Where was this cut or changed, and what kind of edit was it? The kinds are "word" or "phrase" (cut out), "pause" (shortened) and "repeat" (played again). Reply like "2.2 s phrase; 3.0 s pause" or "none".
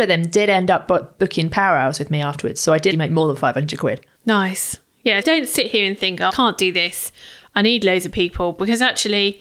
2.9 s word; 4.1 s pause; 5.2 s word; 6.3 s word